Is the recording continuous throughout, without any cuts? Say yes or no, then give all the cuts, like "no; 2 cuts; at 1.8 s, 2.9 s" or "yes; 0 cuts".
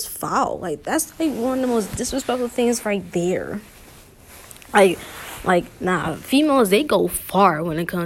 yes; 0 cuts